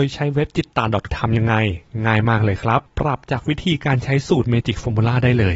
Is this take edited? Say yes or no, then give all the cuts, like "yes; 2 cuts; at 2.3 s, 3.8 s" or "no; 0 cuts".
yes; 2 cuts; at 1.1 s, 2.9 s